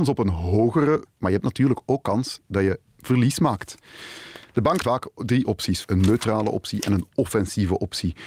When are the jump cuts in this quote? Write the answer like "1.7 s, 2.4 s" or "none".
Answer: 1.1 s, 2.9 s, 4.8 s, 5.8 s